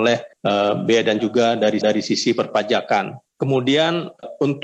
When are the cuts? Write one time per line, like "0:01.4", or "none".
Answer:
0:01.2
0:01.8